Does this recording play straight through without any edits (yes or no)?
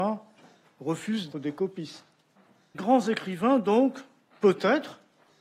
no